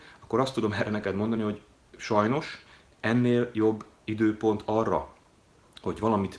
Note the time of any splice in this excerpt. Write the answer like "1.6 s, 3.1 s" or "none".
none